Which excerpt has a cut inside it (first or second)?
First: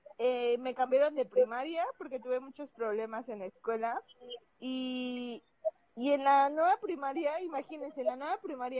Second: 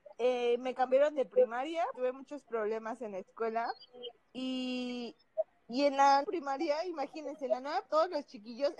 second